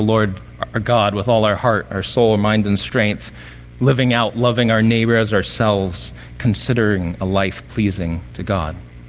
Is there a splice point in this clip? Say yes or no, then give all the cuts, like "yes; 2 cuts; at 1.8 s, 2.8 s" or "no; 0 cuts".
no; 0 cuts